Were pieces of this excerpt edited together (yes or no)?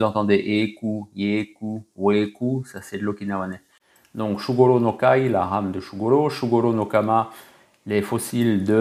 no